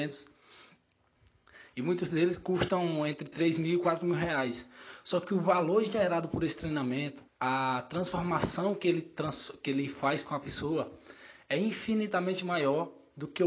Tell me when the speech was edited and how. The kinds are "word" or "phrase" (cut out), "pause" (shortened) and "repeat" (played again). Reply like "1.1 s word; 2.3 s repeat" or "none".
7.3 s pause